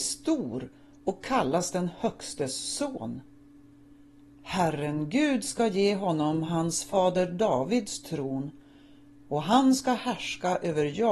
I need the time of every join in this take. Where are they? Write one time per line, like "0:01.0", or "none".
none